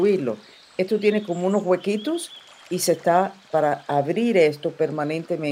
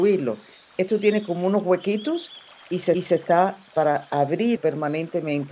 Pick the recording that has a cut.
second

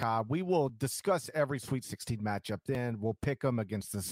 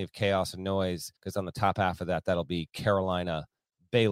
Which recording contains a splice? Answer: second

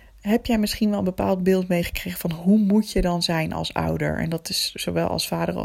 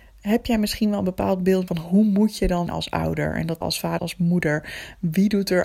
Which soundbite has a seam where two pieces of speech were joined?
second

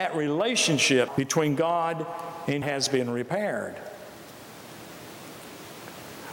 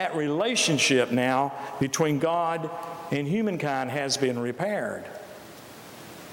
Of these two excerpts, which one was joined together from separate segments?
first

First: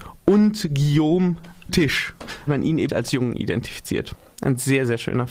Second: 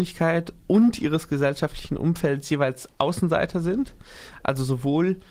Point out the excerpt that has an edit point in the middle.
first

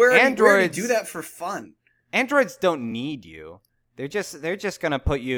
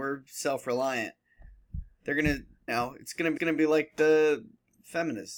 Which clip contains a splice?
second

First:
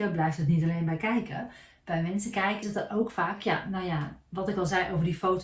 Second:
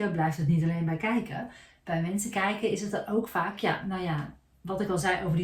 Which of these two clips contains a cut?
first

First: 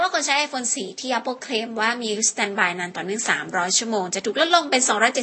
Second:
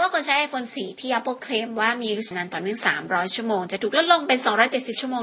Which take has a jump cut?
second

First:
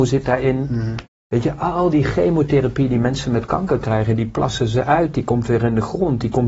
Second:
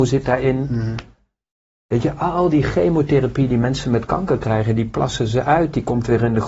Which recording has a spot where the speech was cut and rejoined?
first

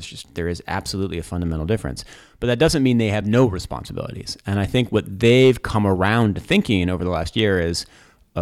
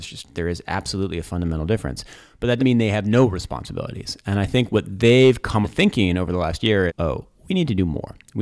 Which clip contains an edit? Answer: second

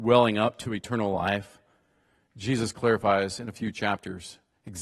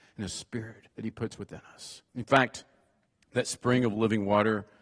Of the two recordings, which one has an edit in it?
second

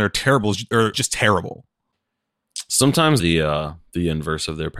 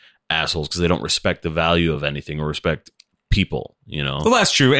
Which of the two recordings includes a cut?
first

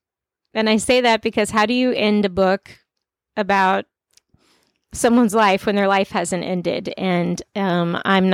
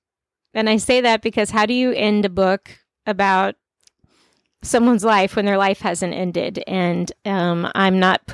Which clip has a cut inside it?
second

